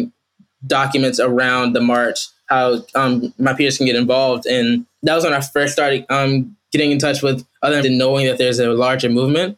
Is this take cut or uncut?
cut